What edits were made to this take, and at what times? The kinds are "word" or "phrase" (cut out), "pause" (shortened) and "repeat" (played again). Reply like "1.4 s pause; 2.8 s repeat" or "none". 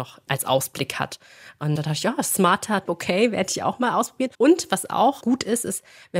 1.8 s word; 2.9 s word; 4.3 s pause